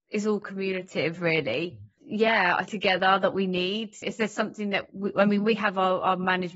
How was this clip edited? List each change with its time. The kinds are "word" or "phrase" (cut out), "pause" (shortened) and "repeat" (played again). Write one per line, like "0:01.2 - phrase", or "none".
0:01.9 - pause
0:02.7 - phrase
0:04.0 - word